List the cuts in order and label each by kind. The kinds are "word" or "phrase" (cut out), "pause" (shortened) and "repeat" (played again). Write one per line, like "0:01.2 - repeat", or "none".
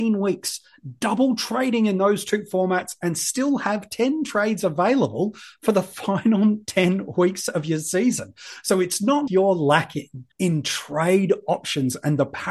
0:09.3 - word
0:10.3 - pause